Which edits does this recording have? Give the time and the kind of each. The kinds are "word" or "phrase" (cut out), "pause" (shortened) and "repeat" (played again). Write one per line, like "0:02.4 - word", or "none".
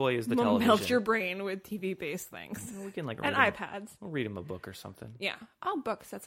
none

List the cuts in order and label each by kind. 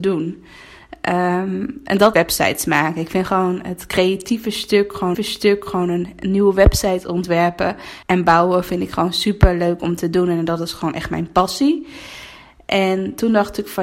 0:02.1 - word
0:05.1 - repeat
0:08.0 - pause

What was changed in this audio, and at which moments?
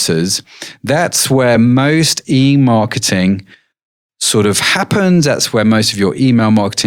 none

